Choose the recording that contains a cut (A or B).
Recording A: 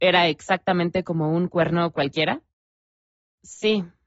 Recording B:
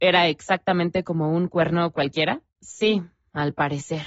B